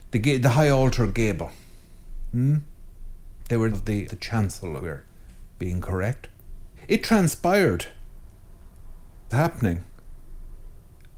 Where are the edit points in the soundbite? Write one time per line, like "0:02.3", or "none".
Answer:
0:03.7
0:04.1
0:04.8
0:06.8
0:09.3